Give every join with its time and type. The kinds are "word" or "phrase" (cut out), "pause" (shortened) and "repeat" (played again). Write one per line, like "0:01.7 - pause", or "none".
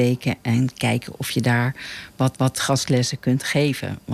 0:02.3 - repeat